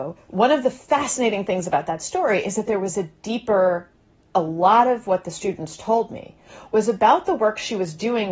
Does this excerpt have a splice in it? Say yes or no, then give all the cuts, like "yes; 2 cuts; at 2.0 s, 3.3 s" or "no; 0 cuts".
no; 0 cuts